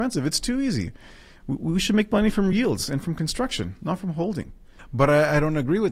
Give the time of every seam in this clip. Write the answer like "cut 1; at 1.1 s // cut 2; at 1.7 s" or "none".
none